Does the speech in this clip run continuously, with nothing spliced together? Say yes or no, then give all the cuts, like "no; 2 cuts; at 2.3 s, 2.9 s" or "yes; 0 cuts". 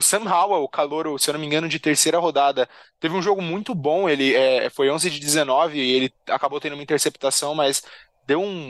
yes; 0 cuts